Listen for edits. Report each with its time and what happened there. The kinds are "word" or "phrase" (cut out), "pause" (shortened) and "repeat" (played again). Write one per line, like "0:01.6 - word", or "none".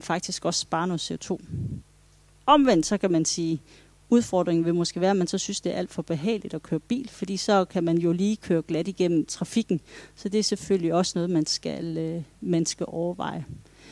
none